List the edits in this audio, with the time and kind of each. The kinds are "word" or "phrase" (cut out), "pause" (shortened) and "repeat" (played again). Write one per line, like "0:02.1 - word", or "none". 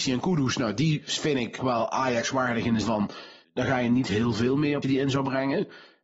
0:01.6 - word
0:02.8 - word
0:03.4 - pause
0:04.8 - word